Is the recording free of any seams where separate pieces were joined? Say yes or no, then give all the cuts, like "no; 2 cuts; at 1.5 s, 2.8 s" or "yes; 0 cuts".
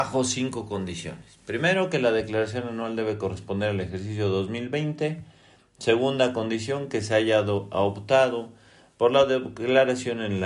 yes; 0 cuts